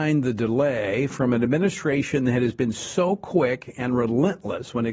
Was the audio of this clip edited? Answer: no; 0 cuts

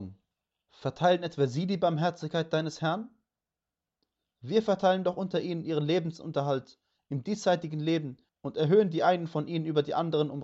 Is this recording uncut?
yes; 0 cuts

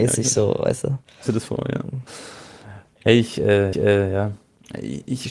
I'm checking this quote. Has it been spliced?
yes; 2 cuts; at 1.3 s, 3.7 s

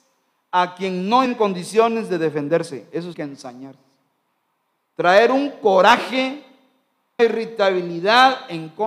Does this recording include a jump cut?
yes; 3 cuts; at 1.3 s, 3.1 s, 7.2 s

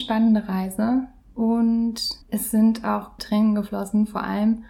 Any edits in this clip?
yes; 2 cuts; at 2.2 s, 3.2 s

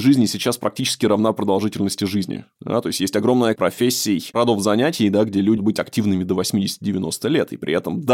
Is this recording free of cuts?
no; 2 cuts; at 3.6 s, 5.6 s

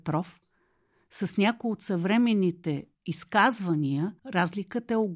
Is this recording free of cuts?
no; 1 cut; at 4.2 s

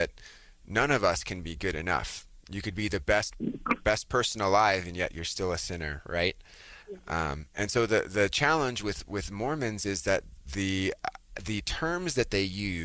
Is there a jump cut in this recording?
yes; 2 cuts; at 6.8 s, 7.5 s

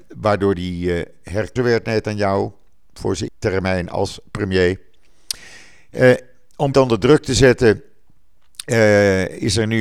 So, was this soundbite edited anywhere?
yes; 3 cuts; at 1.6 s, 3.3 s, 6.7 s

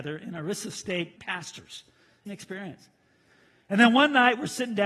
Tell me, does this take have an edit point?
yes; 2 cuts; at 1.2 s, 2.3 s

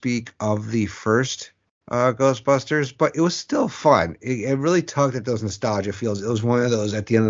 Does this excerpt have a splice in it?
yes; 1 cut; at 1.6 s

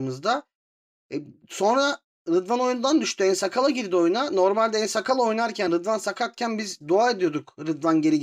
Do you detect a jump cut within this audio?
no; 0 cuts

